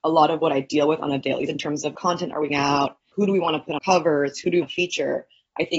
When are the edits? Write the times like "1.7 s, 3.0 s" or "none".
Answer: 1.5 s, 1.9 s, 2.5 s, 3.1 s, 3.8 s, 4.6 s